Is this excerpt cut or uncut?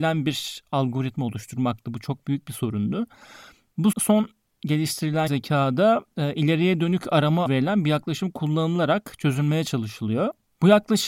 cut